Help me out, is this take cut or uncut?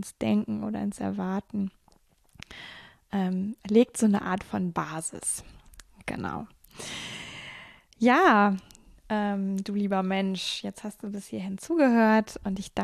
uncut